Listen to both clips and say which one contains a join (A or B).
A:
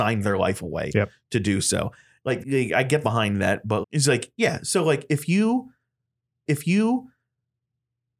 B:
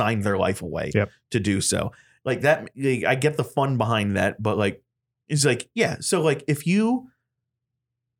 A